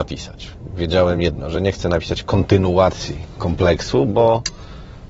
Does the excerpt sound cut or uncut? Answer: uncut